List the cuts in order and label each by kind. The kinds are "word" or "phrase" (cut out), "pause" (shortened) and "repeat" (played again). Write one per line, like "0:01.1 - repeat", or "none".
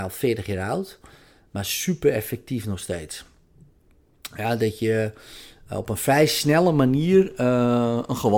none